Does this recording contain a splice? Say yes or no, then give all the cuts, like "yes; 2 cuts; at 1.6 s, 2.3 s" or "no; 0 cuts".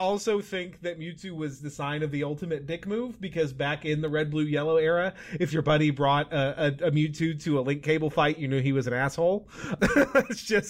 no; 0 cuts